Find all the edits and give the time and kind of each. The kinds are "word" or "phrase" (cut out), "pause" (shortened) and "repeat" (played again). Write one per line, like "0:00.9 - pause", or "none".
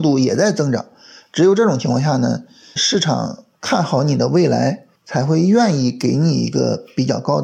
0:02.8 - word
0:04.9 - pause